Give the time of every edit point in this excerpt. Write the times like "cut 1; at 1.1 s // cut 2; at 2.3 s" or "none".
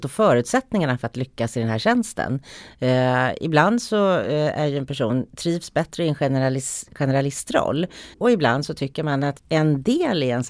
cut 1; at 8.1 s // cut 2; at 9.4 s